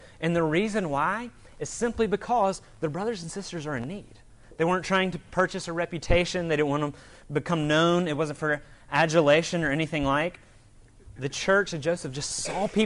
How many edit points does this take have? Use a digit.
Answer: 1